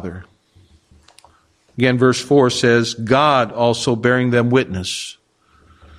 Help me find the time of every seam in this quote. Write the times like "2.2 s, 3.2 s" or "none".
none

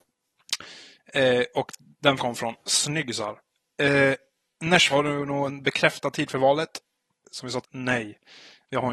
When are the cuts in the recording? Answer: 2.2 s, 4.9 s, 7.6 s

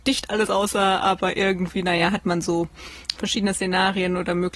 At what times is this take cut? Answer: none

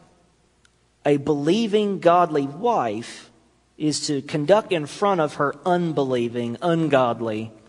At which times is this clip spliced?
4.7 s

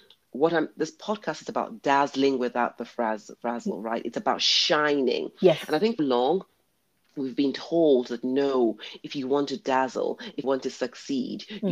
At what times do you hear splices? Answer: 6.0 s, 10.4 s

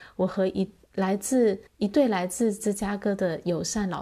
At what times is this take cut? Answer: 1.7 s

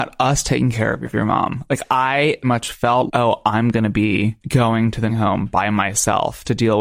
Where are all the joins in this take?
1.0 s, 2.4 s, 3.1 s, 4.4 s, 5.1 s

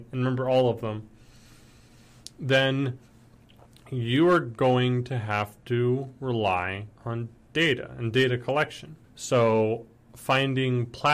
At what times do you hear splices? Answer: 7.0 s, 9.0 s

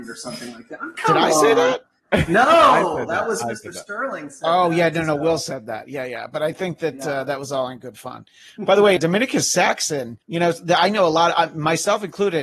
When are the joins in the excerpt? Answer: 9.0 s, 10.2 s

